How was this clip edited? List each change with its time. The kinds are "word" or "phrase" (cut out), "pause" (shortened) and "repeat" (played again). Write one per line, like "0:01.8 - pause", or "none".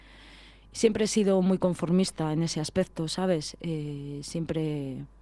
none